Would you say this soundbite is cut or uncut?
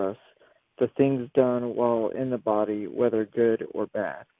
uncut